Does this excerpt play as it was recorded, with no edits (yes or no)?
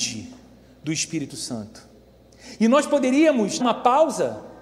no